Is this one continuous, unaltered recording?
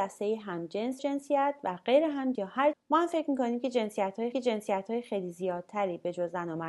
no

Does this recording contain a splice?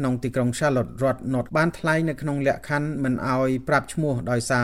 yes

